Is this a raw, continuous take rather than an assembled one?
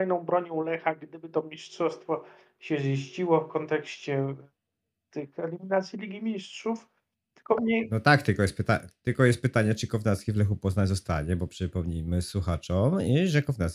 yes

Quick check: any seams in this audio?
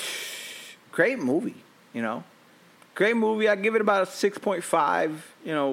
no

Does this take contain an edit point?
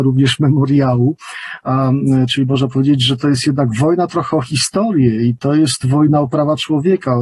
no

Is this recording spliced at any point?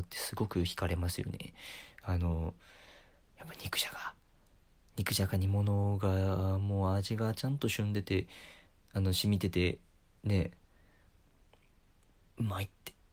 no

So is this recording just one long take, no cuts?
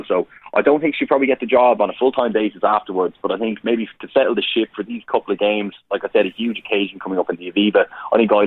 yes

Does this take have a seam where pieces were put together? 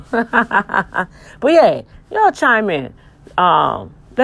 no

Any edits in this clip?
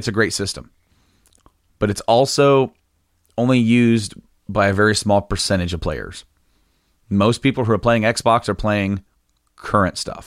no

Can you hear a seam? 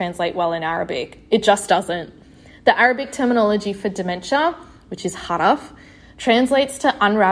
no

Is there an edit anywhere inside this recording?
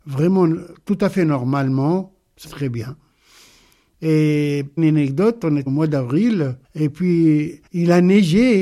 yes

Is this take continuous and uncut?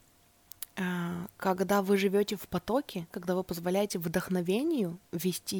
no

